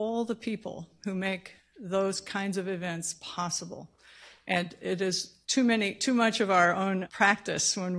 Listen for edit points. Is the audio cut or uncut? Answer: cut